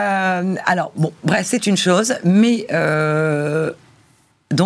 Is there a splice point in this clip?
no; 0 cuts

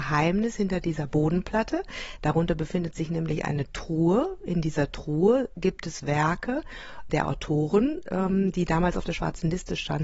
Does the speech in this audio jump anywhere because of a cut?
no; 0 cuts

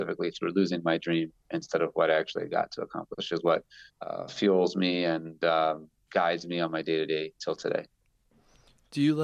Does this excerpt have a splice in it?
yes; 1 cut; at 3.9 s

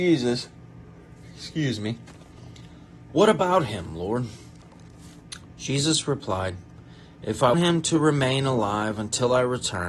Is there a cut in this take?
yes; 1 cut; at 7.5 s

